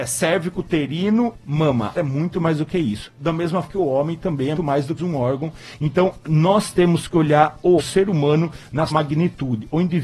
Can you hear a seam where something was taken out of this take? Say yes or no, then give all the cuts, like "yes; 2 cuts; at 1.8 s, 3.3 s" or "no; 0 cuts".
yes; 7 cuts; at 1.4 s, 1.9 s, 3.6 s, 4.5 s, 5.0 s, 7.8 s, 8.9 s